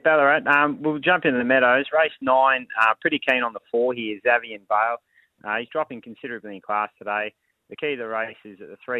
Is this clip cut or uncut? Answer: uncut